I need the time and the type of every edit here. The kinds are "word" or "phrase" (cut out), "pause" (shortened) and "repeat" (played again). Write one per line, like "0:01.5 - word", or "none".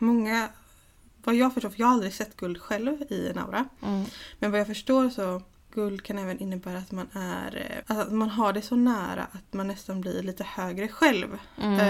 0:05.7 - word
0:07.8 - word